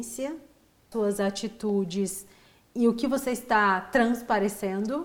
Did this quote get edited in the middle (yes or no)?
yes